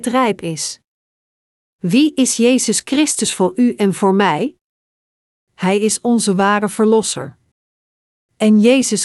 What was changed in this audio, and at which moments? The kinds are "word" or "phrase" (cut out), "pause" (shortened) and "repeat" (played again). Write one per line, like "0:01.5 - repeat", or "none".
none